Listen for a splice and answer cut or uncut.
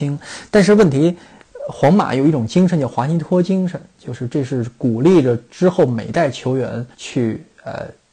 cut